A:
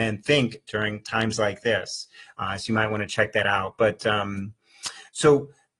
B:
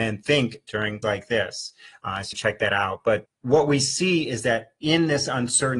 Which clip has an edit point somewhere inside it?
B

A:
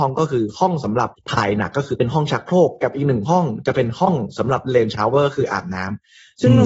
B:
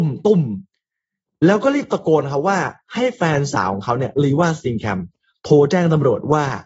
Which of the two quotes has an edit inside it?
A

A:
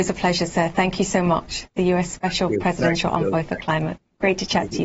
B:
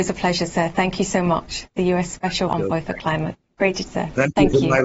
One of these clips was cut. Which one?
B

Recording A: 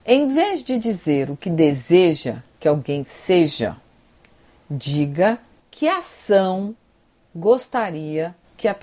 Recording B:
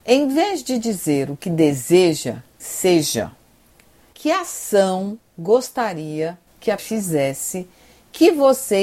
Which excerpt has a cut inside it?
B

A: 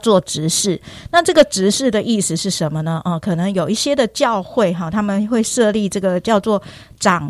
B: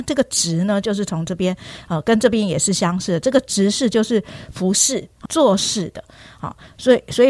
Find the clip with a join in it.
B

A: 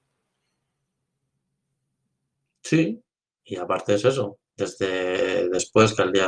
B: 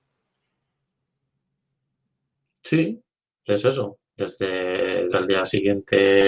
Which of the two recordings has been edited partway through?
B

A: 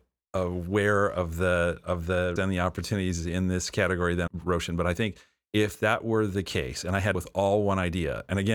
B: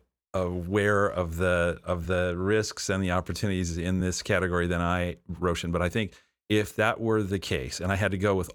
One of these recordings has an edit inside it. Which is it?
A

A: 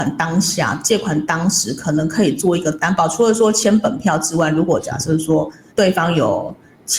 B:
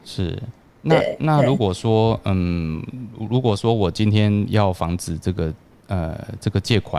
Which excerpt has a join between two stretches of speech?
A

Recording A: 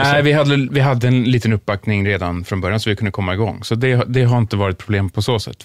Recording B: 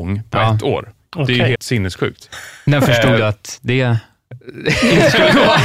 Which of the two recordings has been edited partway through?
B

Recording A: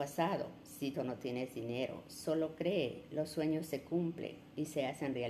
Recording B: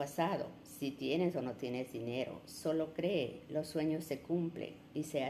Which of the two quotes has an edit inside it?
A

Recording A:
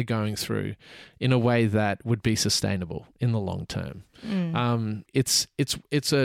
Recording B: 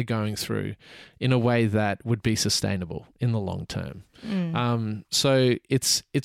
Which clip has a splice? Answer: A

